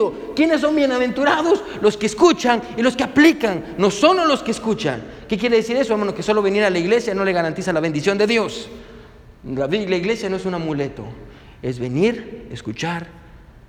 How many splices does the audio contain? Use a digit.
0